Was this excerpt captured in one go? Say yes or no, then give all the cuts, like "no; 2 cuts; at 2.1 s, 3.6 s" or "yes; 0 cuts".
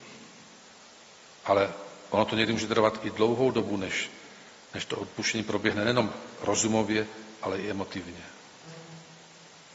yes; 0 cuts